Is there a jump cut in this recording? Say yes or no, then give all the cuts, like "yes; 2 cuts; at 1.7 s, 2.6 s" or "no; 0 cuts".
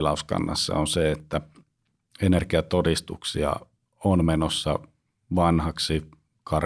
no; 0 cuts